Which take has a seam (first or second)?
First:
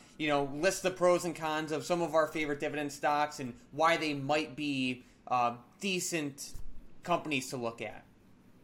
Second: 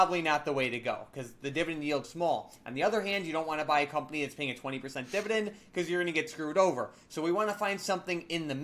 second